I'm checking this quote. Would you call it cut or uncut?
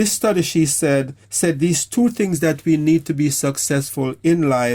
cut